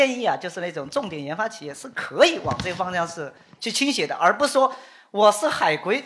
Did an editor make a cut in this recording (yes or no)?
no